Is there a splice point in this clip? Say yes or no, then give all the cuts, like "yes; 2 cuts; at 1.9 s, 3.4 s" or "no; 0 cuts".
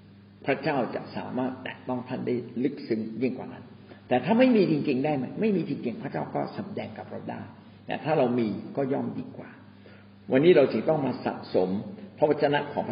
no; 0 cuts